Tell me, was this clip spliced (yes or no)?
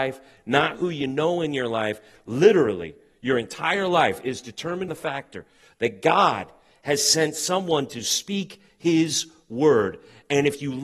yes